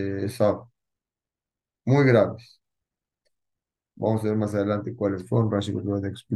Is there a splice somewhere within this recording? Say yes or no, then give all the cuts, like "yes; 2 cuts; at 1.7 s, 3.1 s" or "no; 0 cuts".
no; 0 cuts